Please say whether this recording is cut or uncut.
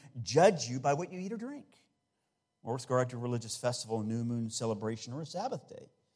uncut